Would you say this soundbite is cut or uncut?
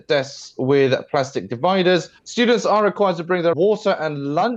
cut